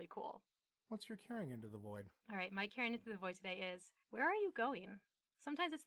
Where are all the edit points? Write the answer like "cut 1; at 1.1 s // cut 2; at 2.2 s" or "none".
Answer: cut 1; at 2.2 s // cut 2; at 4.0 s